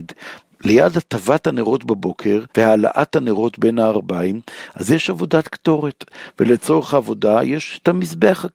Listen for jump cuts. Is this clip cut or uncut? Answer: cut